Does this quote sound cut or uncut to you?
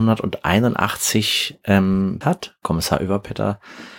cut